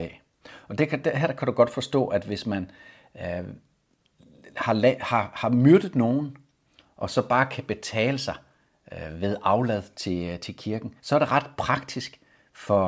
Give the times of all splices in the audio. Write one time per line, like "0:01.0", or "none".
0:11.0